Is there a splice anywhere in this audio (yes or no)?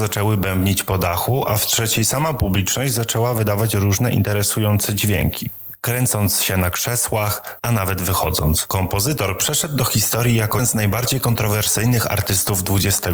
yes